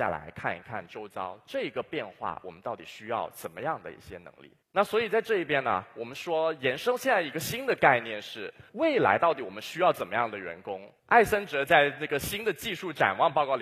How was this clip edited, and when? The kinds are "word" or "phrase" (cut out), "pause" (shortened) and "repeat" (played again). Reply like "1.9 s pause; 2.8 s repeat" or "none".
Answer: 4.6 s pause; 8.7 s pause; 11.0 s pause